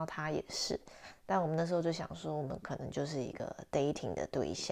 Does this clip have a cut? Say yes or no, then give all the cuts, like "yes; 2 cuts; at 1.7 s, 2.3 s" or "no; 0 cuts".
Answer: no; 0 cuts